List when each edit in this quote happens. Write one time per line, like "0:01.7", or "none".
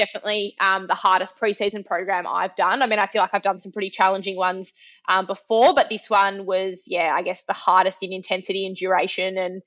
none